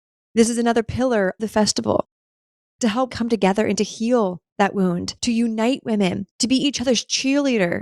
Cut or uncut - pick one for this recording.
cut